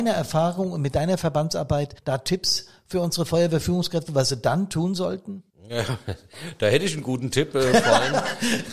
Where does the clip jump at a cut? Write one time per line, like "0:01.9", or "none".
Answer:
0:02.0
0:05.5